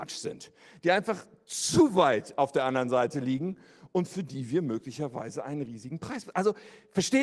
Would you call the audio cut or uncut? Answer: uncut